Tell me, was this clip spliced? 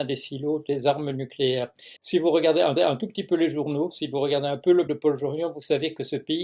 yes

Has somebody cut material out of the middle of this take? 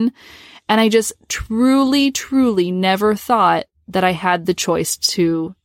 no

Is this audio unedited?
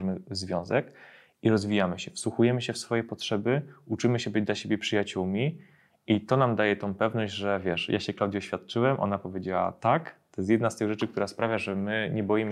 yes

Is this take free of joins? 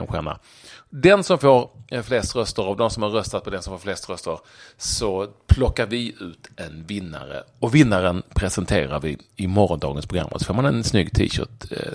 yes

